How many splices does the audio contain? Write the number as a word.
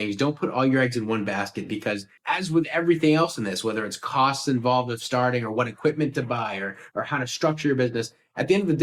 one